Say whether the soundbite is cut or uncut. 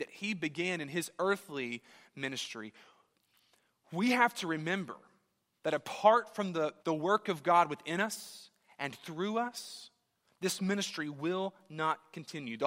cut